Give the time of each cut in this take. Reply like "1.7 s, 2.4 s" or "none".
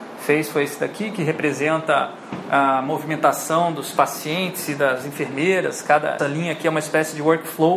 6.2 s